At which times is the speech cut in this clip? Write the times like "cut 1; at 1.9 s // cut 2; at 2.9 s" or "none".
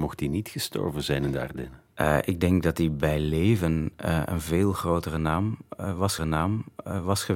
cut 1; at 1.9 s // cut 2; at 6.2 s